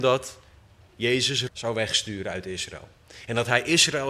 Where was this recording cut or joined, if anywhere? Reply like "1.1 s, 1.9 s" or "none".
1.5 s